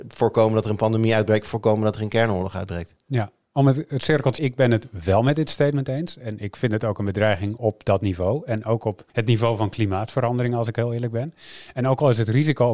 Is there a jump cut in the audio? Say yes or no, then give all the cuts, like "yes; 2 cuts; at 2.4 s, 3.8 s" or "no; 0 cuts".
yes; 3 cuts; at 3.0 s, 4.4 s, 9.1 s